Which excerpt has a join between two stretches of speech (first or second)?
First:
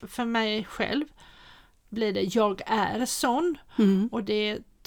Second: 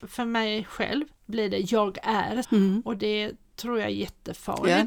second